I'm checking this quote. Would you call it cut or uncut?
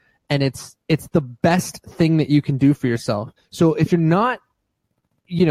cut